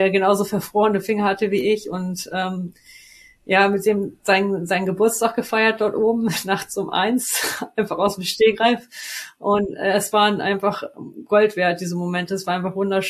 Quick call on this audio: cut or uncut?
uncut